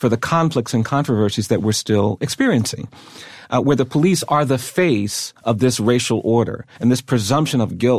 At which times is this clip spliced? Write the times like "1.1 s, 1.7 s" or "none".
6.7 s